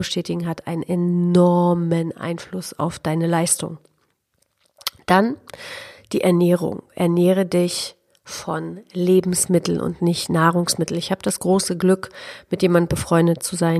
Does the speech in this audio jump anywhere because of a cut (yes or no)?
no